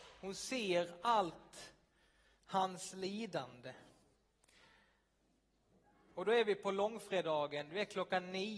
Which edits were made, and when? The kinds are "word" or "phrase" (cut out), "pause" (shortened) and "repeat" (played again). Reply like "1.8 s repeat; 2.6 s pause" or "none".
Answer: none